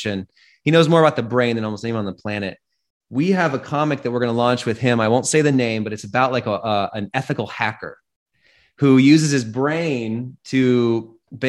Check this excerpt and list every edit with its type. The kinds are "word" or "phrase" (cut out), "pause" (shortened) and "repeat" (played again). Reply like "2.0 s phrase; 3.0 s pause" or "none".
none